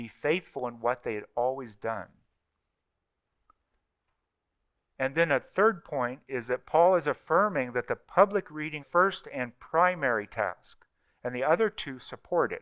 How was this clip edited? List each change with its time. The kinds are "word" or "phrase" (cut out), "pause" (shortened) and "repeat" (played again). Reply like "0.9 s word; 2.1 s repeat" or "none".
8.8 s phrase